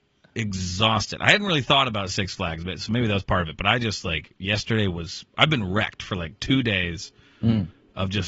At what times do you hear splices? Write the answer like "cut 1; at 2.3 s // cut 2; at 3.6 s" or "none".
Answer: cut 1; at 5.3 s